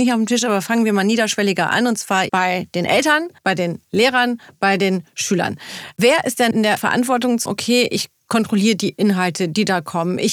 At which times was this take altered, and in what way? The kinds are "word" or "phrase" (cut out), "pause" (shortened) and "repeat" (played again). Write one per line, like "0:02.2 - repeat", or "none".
0:02.3 - word
0:03.4 - pause
0:07.5 - word